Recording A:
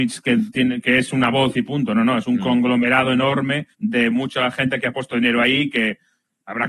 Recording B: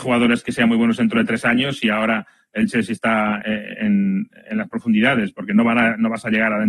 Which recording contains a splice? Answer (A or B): A